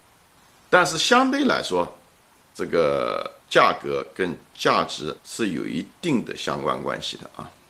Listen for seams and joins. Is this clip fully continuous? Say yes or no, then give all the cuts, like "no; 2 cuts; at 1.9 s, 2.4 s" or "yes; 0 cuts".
no; 3 cuts; at 2.3 s, 3.4 s, 5.2 s